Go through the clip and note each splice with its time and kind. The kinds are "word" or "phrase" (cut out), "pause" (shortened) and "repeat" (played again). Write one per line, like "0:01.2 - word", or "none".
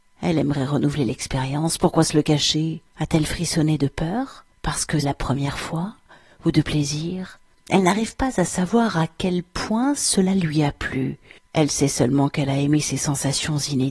0:02.9 - pause
0:04.5 - pause
0:05.0 - word
0:07.5 - pause
0:11.4 - pause